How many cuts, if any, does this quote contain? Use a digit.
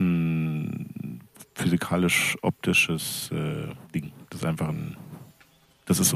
1